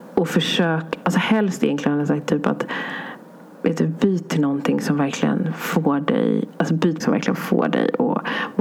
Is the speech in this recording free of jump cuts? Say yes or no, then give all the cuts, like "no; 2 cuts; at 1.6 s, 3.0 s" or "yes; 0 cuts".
no; 1 cut; at 7.0 s